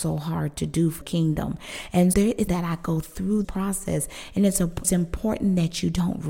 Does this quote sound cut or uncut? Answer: cut